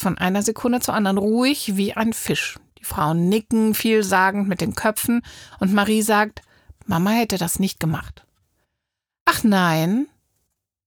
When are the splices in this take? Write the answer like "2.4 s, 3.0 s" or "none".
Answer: none